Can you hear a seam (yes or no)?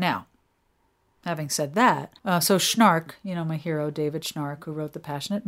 yes